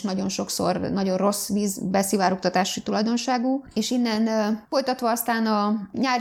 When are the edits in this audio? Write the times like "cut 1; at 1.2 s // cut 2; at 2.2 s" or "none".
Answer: none